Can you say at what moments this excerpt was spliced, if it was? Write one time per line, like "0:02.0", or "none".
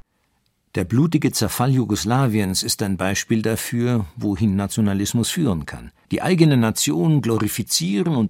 0:06.0